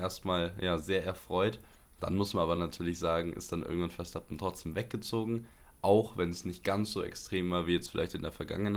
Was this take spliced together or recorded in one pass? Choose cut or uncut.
uncut